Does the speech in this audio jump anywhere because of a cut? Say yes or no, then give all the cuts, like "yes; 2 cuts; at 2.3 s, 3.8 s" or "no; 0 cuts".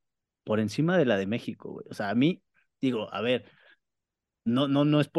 no; 0 cuts